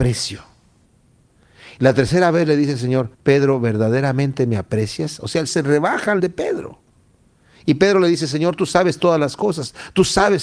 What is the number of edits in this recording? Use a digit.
3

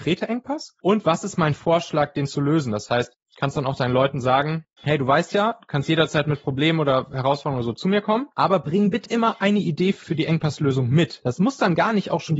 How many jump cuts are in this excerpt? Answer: 1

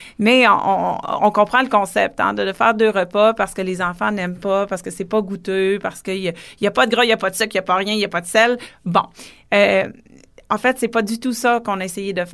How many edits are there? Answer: 0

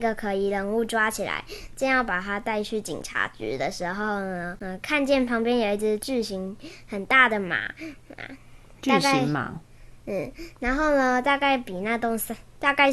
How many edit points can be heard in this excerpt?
0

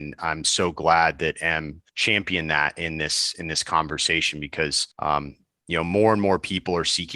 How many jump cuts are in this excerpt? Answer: 2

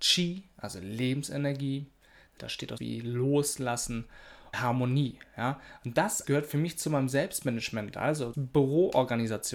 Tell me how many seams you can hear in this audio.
5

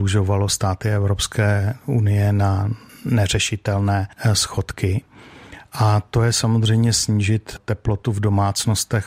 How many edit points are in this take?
0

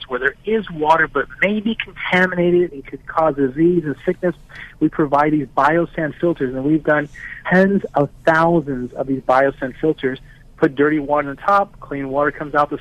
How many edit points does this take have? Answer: 1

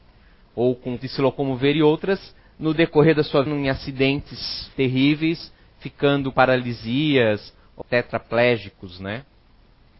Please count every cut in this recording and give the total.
6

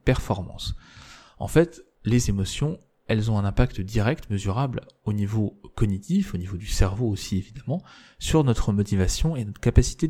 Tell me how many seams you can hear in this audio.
1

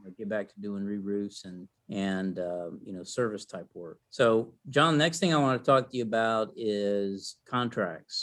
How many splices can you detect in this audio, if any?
2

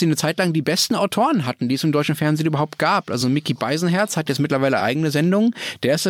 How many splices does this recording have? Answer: 0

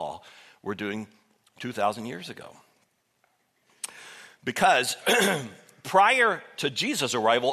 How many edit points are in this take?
0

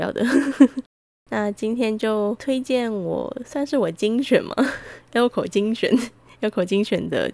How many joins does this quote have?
0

